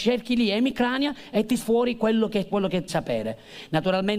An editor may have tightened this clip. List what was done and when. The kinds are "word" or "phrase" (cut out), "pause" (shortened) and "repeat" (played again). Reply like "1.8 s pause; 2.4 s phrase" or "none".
1.6 s word; 2.5 s word; 2.9 s word